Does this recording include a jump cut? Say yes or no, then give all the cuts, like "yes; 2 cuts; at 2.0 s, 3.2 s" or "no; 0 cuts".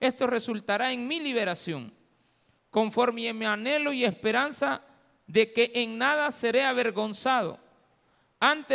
no; 0 cuts